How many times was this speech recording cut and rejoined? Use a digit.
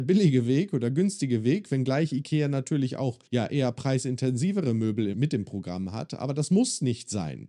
2